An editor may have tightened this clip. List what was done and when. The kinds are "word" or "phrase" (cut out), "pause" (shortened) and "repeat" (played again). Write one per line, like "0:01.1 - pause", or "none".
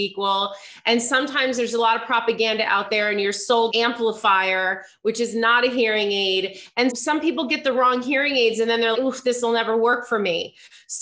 0:03.7 - word
0:06.9 - word
0:08.9 - word